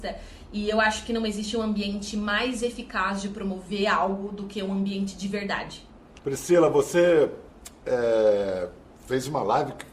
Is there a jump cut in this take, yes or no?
no